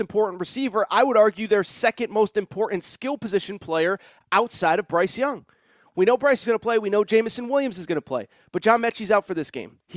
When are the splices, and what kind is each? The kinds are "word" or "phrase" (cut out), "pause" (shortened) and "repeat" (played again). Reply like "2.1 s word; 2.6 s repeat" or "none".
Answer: 6.4 s word